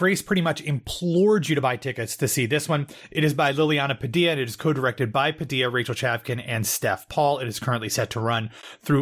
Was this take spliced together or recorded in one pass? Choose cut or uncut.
uncut